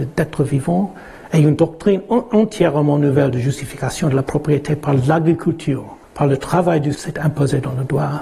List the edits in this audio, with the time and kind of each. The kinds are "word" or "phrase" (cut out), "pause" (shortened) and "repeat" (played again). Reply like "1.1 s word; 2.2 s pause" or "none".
6.0 s pause; 6.9 s word